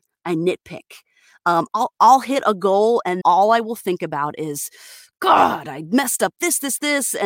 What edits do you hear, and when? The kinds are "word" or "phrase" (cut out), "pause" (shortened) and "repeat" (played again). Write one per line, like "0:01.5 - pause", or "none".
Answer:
0:03.2 - word